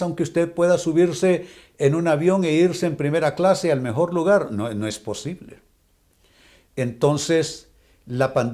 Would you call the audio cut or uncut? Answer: uncut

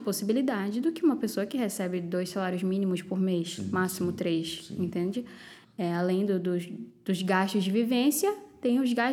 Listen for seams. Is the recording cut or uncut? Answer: uncut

